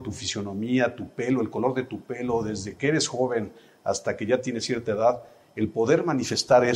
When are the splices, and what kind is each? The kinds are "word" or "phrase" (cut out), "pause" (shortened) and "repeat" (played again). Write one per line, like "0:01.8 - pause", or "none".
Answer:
none